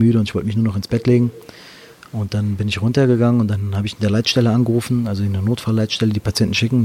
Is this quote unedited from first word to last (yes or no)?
yes